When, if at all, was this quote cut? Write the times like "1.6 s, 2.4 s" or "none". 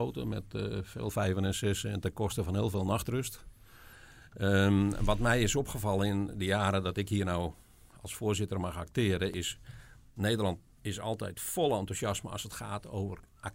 none